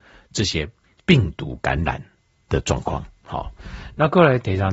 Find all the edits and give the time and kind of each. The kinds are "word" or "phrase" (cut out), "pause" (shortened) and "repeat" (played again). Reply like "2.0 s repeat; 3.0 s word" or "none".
none